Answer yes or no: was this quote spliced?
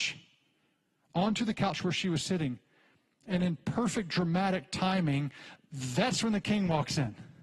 no